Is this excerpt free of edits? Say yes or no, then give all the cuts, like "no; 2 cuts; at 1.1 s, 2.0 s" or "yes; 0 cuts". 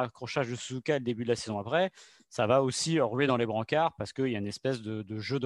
yes; 0 cuts